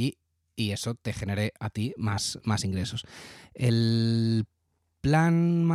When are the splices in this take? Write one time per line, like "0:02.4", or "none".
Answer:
none